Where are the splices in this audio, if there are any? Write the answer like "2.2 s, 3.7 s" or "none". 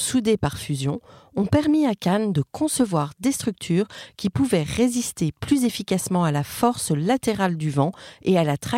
none

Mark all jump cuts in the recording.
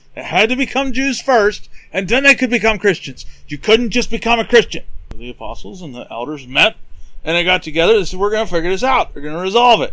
none

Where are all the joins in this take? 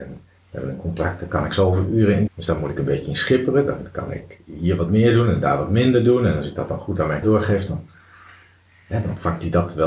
2.3 s, 7.2 s

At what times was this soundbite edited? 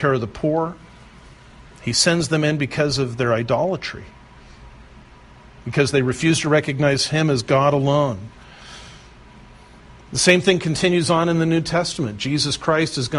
none

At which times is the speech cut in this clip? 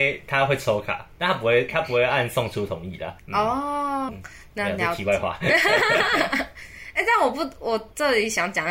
3.2 s, 4.1 s

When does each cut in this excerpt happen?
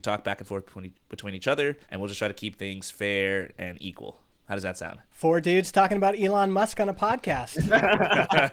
1.8 s, 5.0 s

